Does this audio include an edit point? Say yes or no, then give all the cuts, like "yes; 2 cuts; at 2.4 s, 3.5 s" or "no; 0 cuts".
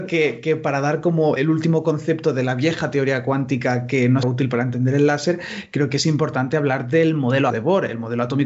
yes; 3 cuts; at 1.4 s, 4.2 s, 7.5 s